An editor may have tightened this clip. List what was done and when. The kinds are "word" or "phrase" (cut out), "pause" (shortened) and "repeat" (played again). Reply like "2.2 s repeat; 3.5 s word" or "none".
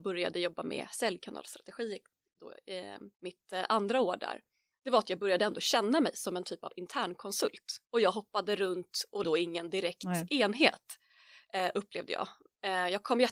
3.1 s pause; 7.8 s pause; 9.2 s phrase